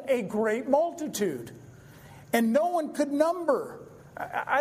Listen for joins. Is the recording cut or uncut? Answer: uncut